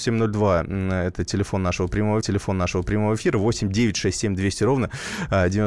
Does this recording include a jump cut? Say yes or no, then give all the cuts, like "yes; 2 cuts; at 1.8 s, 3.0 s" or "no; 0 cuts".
yes; 1 cut; at 2.2 s